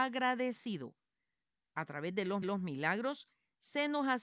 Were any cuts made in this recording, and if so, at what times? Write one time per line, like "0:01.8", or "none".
0:02.4